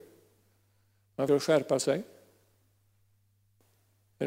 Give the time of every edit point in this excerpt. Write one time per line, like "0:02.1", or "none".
0:01.3